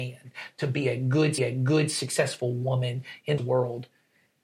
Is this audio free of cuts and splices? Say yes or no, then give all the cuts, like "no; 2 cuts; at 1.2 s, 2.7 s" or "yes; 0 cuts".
no; 2 cuts; at 1.4 s, 3.4 s